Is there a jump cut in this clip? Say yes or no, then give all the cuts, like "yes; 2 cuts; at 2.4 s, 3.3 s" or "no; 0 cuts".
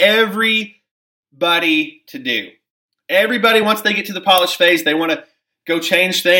no; 0 cuts